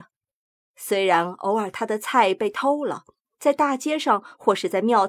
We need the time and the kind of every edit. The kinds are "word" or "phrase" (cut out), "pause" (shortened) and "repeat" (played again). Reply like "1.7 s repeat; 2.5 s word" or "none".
none